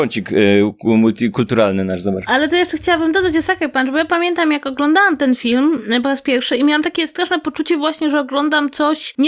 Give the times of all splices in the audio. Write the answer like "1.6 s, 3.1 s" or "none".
none